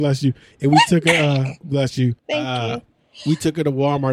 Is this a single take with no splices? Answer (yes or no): no